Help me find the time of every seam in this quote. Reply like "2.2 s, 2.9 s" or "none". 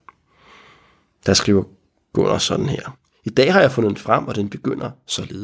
none